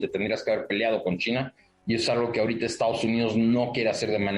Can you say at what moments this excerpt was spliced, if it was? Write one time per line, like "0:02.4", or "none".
none